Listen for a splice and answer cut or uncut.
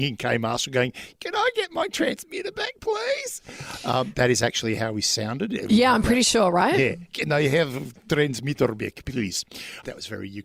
cut